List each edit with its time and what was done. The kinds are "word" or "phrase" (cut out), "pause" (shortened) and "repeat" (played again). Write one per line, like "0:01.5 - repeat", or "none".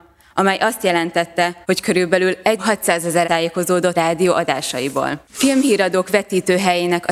0:01.6 - pause
0:02.6 - word
0:03.2 - word
0:03.9 - word
0:05.2 - pause